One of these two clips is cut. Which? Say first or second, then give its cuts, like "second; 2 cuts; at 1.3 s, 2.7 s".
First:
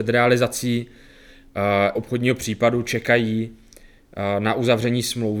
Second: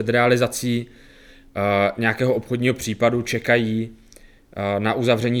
first; 1 cut; at 1.9 s